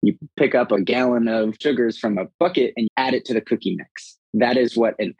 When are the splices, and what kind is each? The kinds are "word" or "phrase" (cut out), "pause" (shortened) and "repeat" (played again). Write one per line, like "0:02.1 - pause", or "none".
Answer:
0:01.6 - word
0:02.9 - word